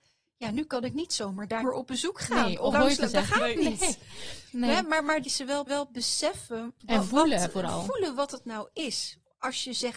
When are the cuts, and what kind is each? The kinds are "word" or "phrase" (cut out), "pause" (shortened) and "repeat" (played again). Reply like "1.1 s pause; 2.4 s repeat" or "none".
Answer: 1.6 s word; 2.7 s phrase; 5.2 s phrase; 5.7 s repeat

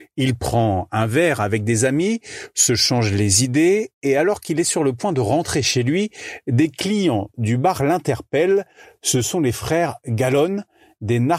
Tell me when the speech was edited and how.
none

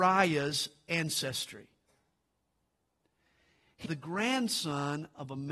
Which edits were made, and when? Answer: 3.9 s word

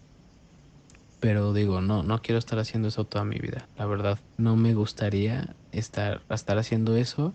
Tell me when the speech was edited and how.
4.3 s pause; 5.6 s pause

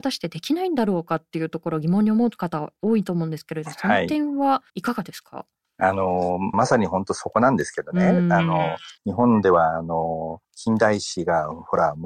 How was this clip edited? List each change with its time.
4.7 s pause; 6.5 s phrase; 9.0 s pause; 10.4 s pause

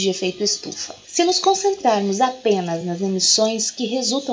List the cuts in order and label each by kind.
none

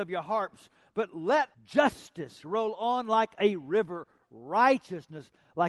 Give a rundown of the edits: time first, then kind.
1.5 s pause

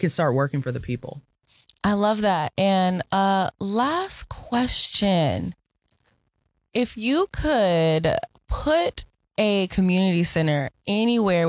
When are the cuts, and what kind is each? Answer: none

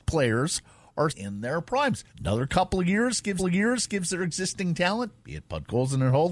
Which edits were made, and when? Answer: 1.1 s word; 2.1 s pause; 3.4 s repeat

